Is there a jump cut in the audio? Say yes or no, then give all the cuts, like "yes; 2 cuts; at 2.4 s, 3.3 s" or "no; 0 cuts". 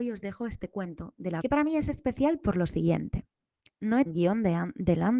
yes; 2 cuts; at 1.4 s, 4.1 s